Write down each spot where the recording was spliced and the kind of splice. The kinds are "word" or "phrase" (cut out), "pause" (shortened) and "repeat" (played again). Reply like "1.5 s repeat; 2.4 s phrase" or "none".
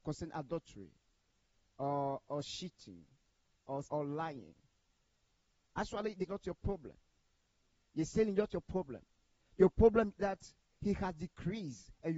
2.3 s word; 3.8 s word; 6.2 s word; 10.2 s word